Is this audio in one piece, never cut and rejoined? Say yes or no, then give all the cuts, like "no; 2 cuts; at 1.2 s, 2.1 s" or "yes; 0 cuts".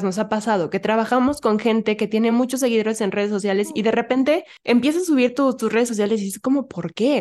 yes; 0 cuts